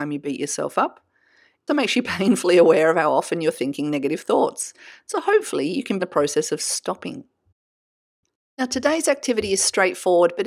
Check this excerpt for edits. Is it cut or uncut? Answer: cut